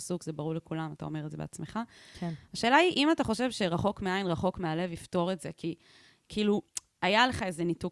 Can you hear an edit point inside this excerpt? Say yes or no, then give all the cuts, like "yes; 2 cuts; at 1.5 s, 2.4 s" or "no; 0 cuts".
no; 0 cuts